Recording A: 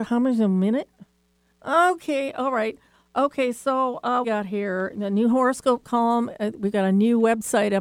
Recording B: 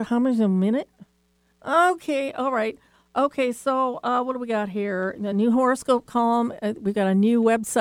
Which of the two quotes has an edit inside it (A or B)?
A